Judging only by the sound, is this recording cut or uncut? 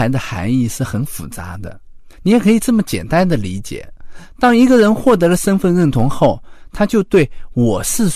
cut